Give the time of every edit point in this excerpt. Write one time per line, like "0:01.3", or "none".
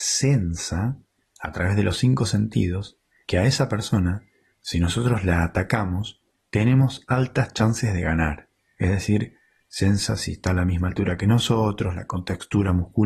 none